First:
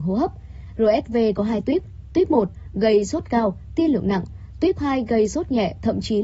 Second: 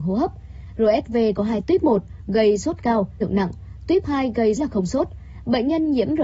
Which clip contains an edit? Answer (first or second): second